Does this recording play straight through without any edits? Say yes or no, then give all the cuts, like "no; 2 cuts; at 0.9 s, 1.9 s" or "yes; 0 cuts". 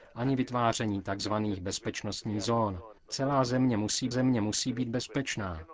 no; 2 cuts; at 3.0 s, 4.1 s